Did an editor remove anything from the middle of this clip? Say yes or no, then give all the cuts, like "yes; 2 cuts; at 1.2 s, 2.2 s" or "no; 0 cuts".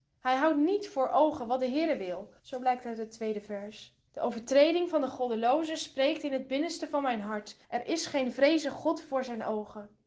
yes; 3 cuts; at 2.4 s, 4.1 s, 7.6 s